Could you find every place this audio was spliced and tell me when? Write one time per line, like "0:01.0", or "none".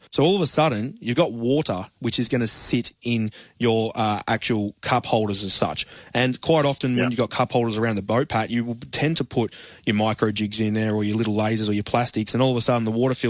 none